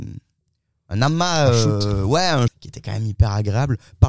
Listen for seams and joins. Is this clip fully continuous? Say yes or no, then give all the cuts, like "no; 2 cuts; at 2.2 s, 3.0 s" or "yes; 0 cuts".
no; 1 cut; at 2.5 s